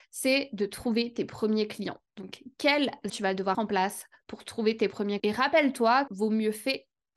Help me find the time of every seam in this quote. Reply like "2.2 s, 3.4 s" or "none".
3.1 s, 3.5 s, 5.2 s, 6.1 s